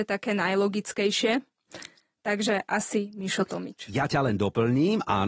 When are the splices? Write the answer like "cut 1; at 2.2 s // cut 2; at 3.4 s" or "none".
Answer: none

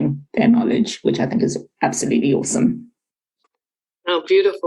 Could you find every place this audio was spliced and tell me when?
none

